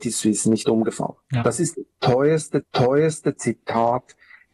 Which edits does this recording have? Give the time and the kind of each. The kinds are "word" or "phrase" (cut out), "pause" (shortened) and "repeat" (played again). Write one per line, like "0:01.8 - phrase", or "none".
0:01.2 - pause
0:02.6 - repeat